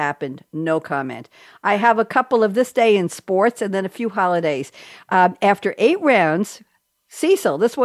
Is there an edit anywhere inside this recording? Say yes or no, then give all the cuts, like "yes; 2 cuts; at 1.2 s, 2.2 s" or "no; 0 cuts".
no; 0 cuts